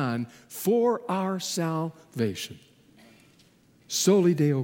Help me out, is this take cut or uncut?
uncut